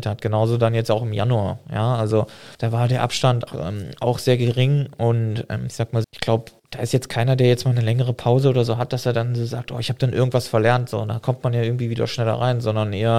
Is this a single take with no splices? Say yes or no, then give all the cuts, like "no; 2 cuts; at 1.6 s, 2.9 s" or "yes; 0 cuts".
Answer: no; 4 cuts; at 2.5 s, 3.5 s, 6.0 s, 6.6 s